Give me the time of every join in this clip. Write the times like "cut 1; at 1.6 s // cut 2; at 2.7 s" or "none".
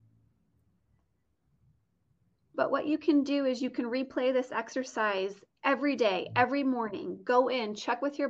none